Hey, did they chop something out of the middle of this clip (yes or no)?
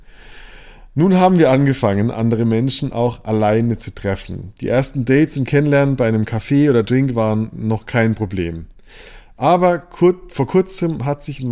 no